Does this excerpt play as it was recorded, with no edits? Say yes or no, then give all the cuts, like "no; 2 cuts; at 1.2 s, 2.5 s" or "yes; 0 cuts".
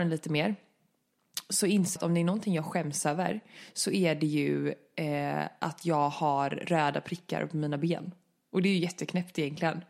no; 1 cut; at 2.0 s